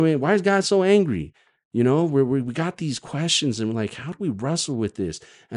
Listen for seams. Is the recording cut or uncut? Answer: uncut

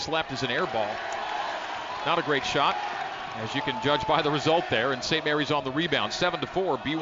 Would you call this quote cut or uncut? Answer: uncut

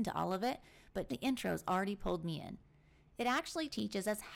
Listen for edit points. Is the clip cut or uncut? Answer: cut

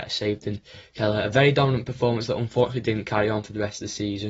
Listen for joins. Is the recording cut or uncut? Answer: uncut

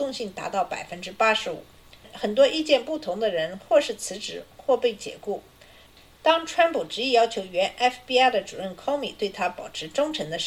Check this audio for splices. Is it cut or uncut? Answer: uncut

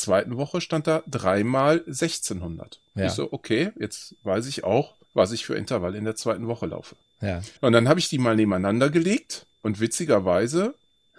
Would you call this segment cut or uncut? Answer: cut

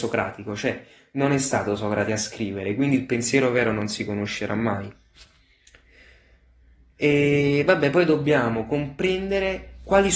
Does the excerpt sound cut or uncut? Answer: uncut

